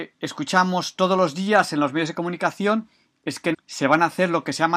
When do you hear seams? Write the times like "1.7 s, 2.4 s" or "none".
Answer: 3.5 s